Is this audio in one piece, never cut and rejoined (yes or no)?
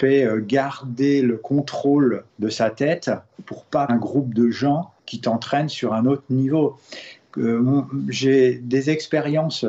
no